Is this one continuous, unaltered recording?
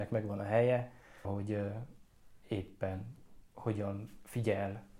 no; 1 cut; at 1.2 s

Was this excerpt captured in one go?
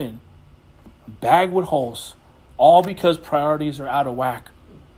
yes; 0 cuts

